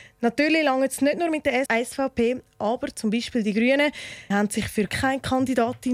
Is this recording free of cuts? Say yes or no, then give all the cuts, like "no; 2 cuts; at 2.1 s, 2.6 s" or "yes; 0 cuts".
no; 3 cuts; at 1.7 s, 4.3 s, 4.9 s